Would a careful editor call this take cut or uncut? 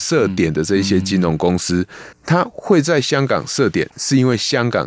cut